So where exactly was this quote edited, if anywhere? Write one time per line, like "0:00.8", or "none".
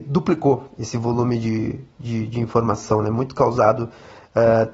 none